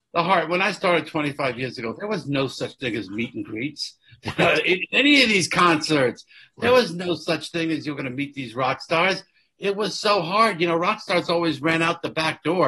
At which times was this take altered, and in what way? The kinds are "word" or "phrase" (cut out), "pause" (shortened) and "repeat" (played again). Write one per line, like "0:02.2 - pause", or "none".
none